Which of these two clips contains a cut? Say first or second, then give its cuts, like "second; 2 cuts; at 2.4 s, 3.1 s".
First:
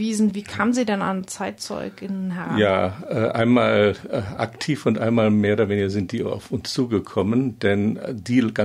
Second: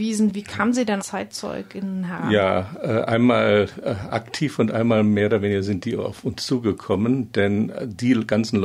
second; 1 cut; at 1.0 s